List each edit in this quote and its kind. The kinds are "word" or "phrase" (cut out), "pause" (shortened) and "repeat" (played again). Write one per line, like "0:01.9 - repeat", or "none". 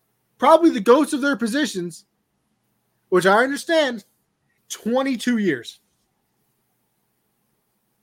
0:04.6 - word